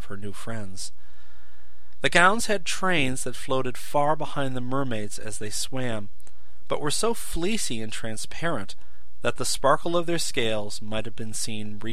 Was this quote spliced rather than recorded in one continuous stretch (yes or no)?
no